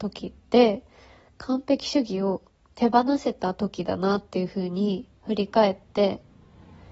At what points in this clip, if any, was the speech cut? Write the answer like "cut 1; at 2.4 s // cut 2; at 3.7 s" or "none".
cut 1; at 2.6 s // cut 2; at 5.2 s